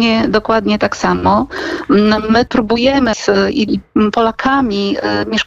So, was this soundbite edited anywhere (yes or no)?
yes